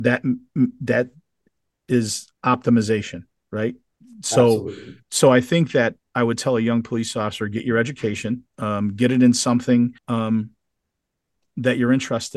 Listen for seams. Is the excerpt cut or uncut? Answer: cut